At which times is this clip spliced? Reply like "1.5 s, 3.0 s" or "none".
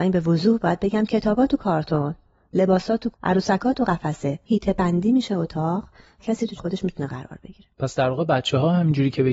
3.1 s, 4.5 s, 6.2 s, 6.6 s

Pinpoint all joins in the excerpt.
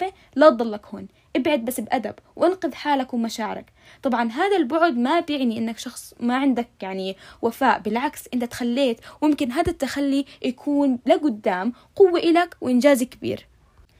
none

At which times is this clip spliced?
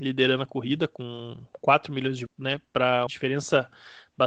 2.3 s, 3.1 s

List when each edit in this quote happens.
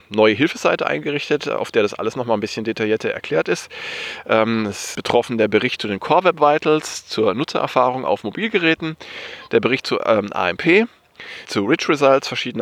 4.9 s, 11.5 s

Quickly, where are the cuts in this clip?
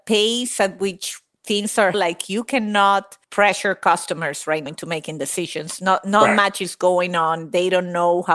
1.9 s, 3.2 s, 4.7 s

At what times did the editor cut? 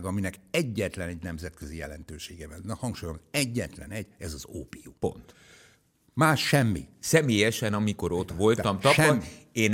5.0 s

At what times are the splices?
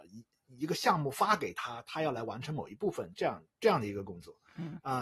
3.5 s

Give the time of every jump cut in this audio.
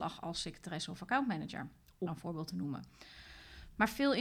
2.1 s

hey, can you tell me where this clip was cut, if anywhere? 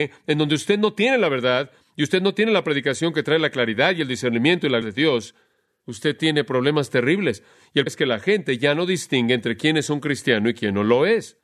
4.8 s, 7.9 s

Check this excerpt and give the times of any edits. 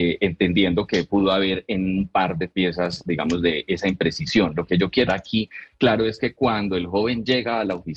5.1 s

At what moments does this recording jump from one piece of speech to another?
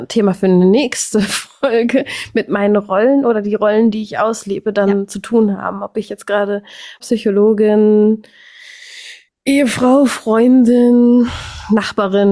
7.0 s

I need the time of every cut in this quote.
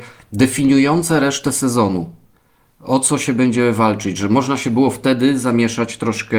none

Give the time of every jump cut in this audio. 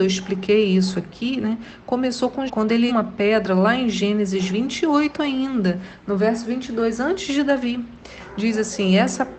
2.5 s, 2.9 s

